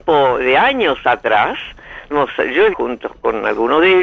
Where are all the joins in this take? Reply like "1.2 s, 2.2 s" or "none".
2.1 s, 2.7 s

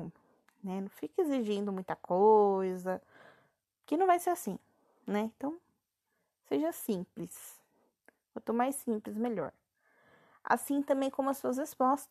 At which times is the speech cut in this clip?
none

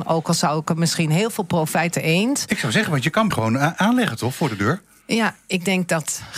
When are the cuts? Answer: 1.9 s, 3.3 s

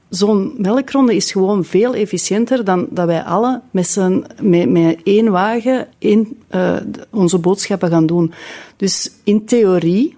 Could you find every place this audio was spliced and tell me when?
5.9 s

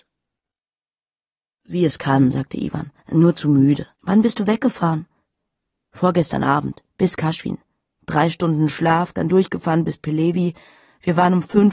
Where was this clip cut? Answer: 3.0 s, 4.0 s, 6.9 s

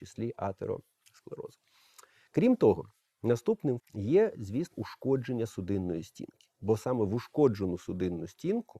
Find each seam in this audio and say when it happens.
3.8 s, 4.7 s

